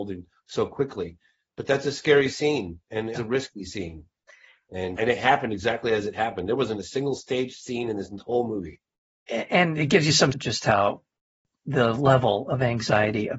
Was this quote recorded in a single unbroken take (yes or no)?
no